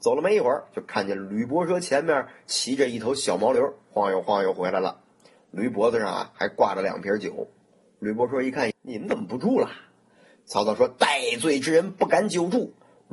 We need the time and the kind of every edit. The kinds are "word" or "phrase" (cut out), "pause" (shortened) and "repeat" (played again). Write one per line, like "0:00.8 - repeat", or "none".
0:08.7 - word